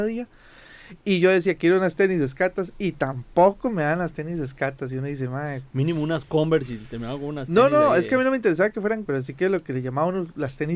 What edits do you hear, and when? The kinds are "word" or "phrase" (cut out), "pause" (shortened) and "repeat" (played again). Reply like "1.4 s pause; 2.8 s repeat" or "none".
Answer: 9.1 s word